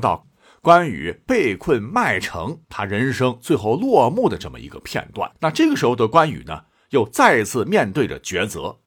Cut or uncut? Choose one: cut